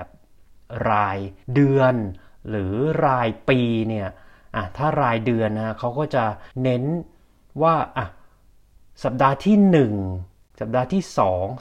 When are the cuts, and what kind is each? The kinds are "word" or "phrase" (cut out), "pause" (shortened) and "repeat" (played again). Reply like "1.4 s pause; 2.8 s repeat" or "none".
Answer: 1.4 s pause; 6.5 s pause

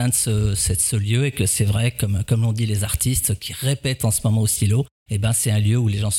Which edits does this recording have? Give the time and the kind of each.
5.0 s pause

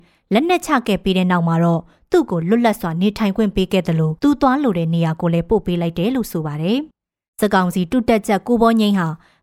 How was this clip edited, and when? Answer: 4.2 s pause; 6.9 s pause

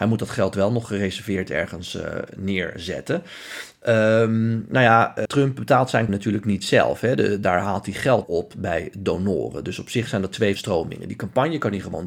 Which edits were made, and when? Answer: 5.3 s word; 6.1 s word; 8.2 s word; 10.6 s word

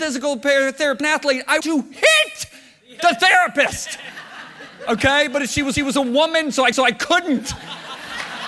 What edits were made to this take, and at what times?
1.0 s phrase; 1.6 s word; 5.7 s repeat; 6.7 s repeat

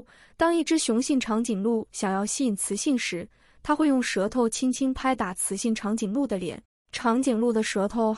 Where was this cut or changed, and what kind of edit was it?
6.7 s pause

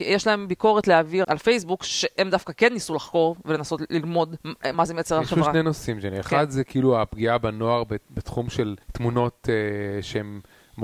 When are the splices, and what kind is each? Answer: 1.2 s word; 4.4 s pause; 4.7 s word; 8.8 s pause

